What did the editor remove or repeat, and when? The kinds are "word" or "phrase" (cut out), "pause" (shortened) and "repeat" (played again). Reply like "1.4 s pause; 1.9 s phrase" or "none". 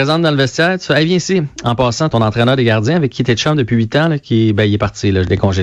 2.1 s word